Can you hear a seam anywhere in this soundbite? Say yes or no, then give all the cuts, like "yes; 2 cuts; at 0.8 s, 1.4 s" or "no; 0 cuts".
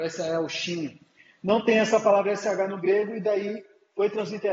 no; 0 cuts